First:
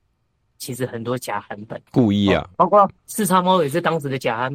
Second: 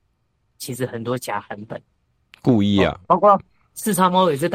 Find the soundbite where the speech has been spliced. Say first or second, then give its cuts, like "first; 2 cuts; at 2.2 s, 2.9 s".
first; 2 cuts; at 1.9 s, 3.0 s